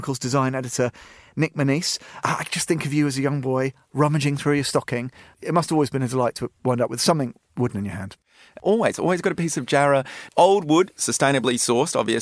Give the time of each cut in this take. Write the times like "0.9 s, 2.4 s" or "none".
none